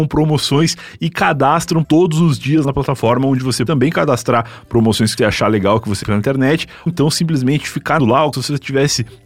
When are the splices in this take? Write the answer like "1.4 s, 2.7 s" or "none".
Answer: 1.8 s, 2.6 s, 3.7 s, 5.2 s, 6.0 s, 6.9 s, 8.0 s, 8.3 s